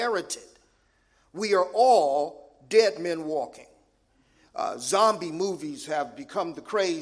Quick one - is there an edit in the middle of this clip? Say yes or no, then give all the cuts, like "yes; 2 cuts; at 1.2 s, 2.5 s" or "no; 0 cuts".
no; 0 cuts